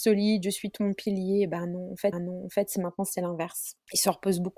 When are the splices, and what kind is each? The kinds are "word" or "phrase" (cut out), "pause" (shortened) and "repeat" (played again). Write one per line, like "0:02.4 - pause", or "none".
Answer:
0:02.1 - repeat